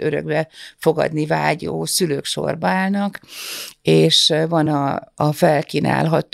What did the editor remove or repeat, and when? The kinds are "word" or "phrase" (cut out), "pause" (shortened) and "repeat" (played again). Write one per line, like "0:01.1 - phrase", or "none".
none